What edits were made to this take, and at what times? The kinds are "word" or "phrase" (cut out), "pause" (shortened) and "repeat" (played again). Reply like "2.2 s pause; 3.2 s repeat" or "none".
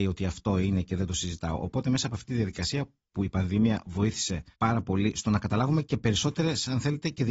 4.5 s pause